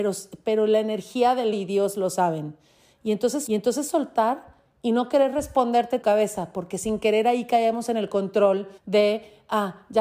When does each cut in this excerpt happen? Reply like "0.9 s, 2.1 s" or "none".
1.5 s, 3.5 s, 6.0 s, 8.8 s